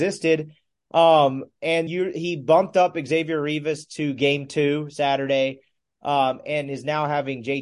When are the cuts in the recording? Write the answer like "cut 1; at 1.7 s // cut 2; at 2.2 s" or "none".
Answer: cut 1; at 1.9 s